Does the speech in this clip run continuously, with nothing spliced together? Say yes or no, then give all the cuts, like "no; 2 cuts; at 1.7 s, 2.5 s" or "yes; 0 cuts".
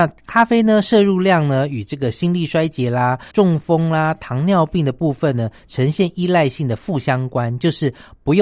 no; 1 cut; at 3.3 s